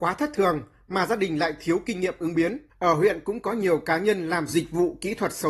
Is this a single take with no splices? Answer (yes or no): no